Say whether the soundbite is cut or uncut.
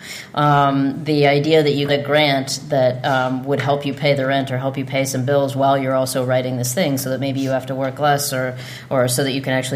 cut